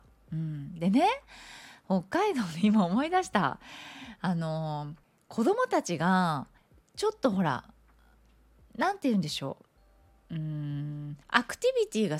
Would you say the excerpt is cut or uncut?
cut